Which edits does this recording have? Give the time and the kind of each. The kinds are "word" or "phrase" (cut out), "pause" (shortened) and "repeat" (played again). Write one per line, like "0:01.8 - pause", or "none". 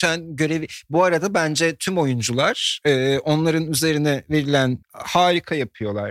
0:04.8 - word